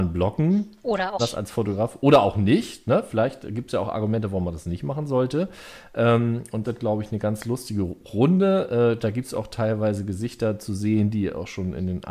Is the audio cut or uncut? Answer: cut